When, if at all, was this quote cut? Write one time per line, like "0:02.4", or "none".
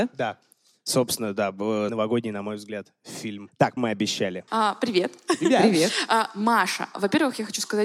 0:01.9
0:03.8